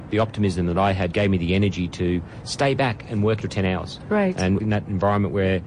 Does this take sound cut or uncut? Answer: cut